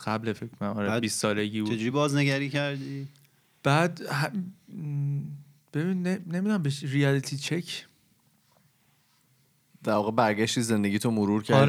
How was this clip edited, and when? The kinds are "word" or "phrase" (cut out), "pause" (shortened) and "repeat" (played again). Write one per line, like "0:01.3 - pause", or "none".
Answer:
none

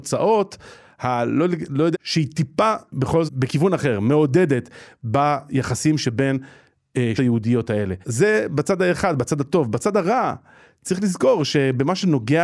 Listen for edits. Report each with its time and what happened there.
0:01.9 - phrase
0:03.3 - word
0:07.2 - phrase
0:08.0 - pause

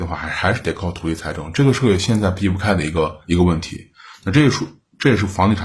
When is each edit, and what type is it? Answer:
0:03.2 - pause

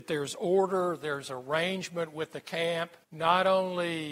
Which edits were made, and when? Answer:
0:03.0 - pause

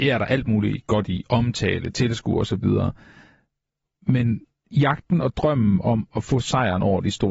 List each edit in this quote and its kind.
none

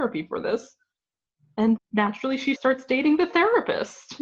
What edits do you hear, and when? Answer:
0:01.8 - word
0:02.6 - word

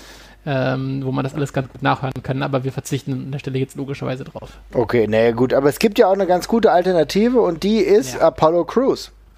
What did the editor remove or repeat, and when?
none

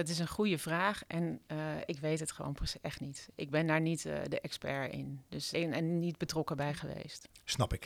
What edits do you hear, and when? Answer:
0:05.5 - word

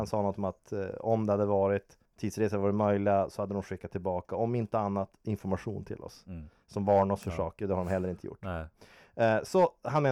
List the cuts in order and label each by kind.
0:02.1 - pause

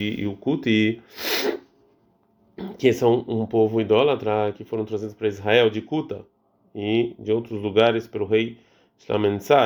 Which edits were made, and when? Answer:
none

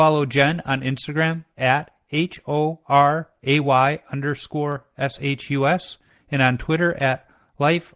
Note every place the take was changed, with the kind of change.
none

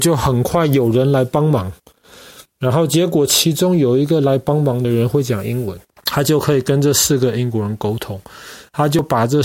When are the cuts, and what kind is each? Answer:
0:05.8 - pause

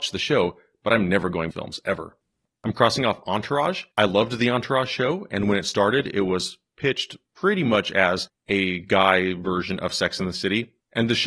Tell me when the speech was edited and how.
0:01.5 - phrase
0:03.9 - pause

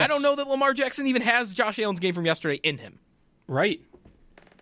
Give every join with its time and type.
none

